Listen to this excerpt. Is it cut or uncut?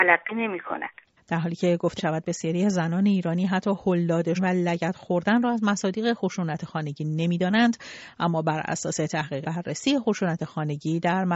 cut